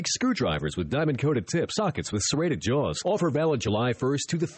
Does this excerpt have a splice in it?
yes; 1 cut; at 1.8 s

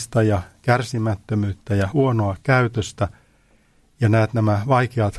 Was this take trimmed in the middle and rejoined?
no; 0 cuts

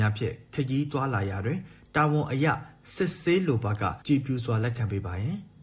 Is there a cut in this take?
yes; 1 cut; at 4.0 s

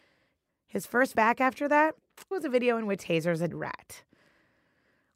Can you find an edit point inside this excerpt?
yes; 4 cuts; at 1.1 s, 2.3 s, 3.0 s, 3.5 s

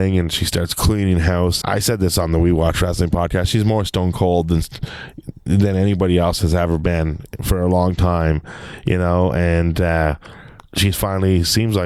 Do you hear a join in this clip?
yes; 1 cut; at 1.6 s

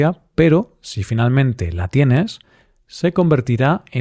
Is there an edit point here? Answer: no; 0 cuts

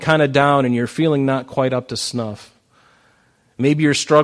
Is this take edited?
no; 0 cuts

